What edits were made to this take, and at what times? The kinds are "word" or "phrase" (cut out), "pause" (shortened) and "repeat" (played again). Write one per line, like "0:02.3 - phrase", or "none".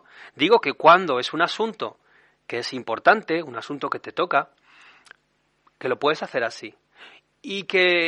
none